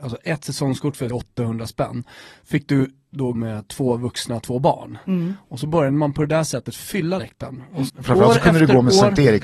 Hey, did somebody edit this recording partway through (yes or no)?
yes